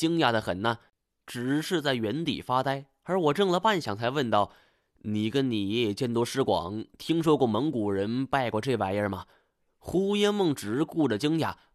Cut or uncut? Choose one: uncut